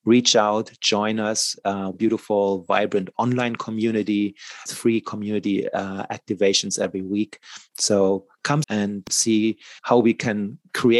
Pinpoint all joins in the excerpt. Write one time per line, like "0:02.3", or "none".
0:01.9
0:04.7
0:08.6
0:09.8